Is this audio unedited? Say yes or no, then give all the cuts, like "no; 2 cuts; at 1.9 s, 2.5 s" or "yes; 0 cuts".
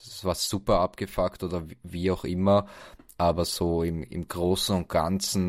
yes; 0 cuts